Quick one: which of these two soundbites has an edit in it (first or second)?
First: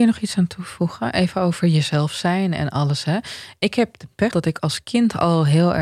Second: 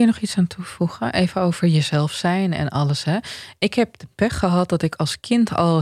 first